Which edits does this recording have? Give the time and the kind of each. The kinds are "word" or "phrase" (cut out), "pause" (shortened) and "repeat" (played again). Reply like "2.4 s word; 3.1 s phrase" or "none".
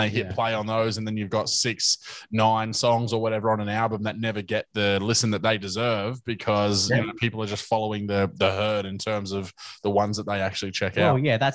none

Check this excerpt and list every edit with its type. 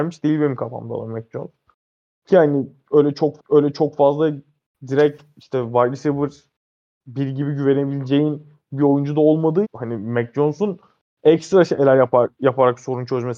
3.4 s repeat; 9.6 s word

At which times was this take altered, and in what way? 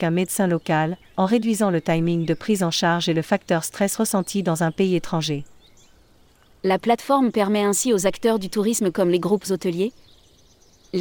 none

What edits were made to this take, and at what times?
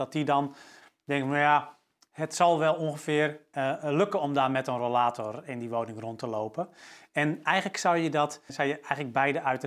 3.5 s word; 8.5 s word

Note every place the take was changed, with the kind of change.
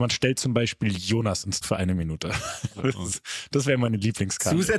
1.6 s word

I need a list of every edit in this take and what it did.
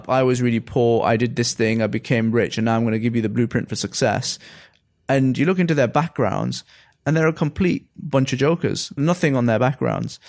none

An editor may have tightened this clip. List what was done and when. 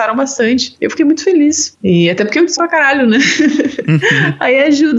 2.6 s phrase

